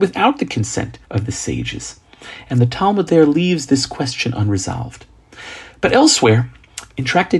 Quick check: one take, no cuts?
no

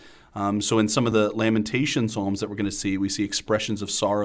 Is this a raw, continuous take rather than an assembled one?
yes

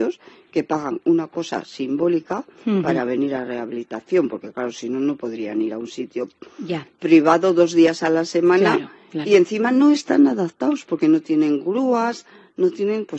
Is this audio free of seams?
yes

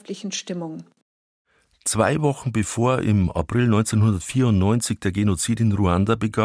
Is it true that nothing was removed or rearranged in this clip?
yes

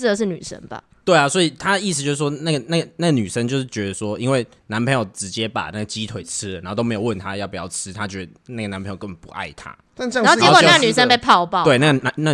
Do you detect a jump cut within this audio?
no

